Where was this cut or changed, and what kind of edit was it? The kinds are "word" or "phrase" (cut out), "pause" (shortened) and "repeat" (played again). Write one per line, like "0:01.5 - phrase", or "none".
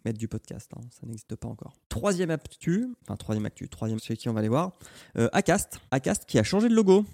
0:01.8 - pause
0:04.0 - word
0:05.9 - pause